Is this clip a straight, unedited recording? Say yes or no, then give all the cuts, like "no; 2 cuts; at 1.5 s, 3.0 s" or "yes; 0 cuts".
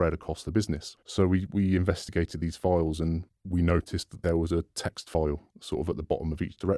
no; 3 cuts; at 1.0 s, 3.3 s, 5.5 s